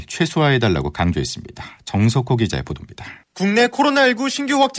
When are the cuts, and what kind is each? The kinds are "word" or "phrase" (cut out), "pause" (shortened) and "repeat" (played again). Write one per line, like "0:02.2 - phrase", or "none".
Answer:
0:03.2 - pause

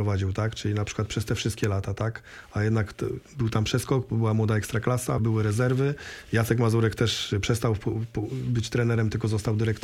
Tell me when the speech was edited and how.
0:03.3 - pause
0:05.2 - word

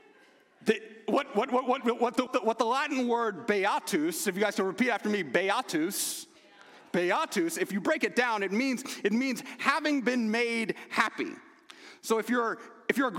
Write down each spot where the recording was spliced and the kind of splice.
0:02.3 - word

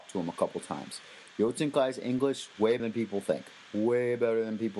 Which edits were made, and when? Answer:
0:02.8 - word

